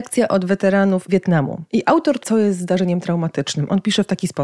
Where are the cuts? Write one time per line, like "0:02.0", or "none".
0:01.1
0:01.7
0:02.2